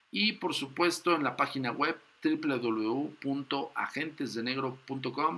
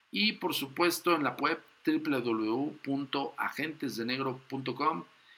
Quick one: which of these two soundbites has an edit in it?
second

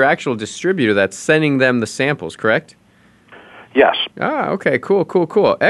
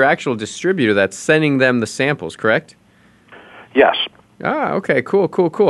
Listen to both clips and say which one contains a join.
first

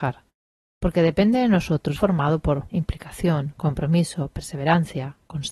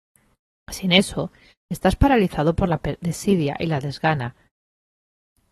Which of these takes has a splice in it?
first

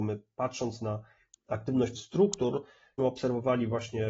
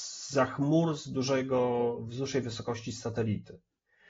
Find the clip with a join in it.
first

